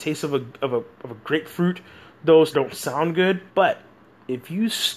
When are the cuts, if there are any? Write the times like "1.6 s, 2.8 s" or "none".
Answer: 2.5 s, 3.5 s